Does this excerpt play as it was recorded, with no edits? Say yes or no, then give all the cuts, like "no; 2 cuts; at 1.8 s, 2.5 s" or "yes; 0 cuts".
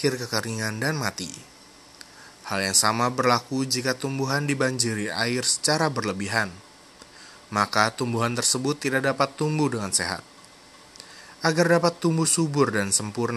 yes; 0 cuts